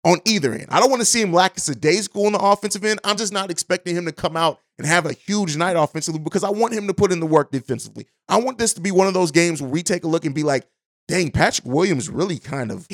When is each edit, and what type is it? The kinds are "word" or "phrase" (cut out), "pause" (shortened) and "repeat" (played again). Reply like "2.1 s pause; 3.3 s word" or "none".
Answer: none